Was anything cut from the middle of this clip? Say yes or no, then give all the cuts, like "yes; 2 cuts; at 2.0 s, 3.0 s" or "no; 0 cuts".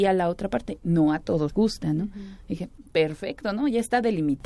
yes; 1 cut; at 1.5 s